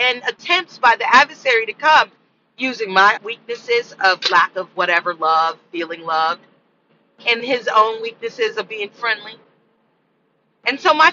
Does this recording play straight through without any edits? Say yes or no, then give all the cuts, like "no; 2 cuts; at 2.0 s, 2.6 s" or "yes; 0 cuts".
no; 4 cuts; at 3.2 s, 4.2 s, 7.4 s, 8.9 s